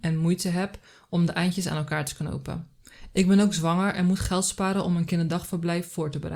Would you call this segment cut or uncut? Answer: uncut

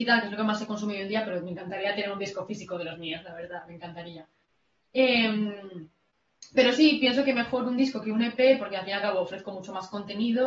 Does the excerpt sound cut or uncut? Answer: uncut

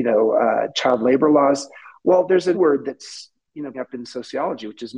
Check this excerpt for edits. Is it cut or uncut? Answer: cut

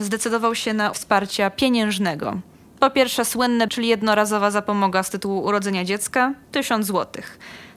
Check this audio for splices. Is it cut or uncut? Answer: cut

